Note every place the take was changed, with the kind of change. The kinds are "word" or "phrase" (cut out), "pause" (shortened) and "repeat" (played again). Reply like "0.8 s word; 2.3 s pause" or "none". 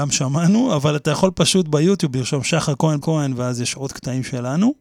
3.0 s word